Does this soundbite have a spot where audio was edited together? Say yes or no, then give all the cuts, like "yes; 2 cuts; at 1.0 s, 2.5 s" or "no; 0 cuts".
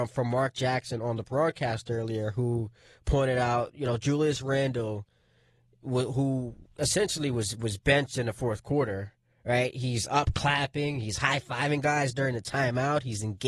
no; 0 cuts